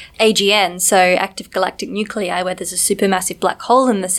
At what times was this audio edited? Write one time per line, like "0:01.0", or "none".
none